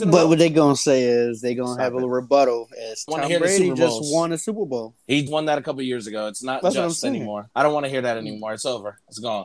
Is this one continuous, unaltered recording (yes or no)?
no